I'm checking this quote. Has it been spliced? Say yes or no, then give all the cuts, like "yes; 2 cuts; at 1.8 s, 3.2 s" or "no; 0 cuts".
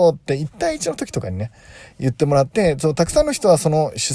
no; 0 cuts